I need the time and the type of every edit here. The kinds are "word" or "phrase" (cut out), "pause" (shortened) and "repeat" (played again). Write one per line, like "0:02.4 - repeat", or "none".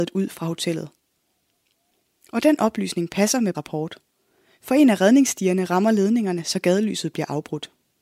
0:03.5 - word